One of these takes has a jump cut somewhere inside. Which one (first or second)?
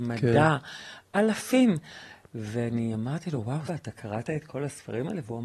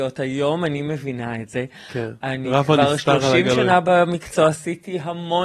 first